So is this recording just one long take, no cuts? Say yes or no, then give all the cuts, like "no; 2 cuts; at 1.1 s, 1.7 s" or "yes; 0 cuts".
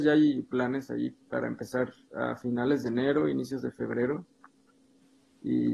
yes; 0 cuts